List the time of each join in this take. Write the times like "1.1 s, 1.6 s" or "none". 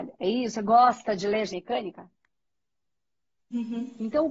1.5 s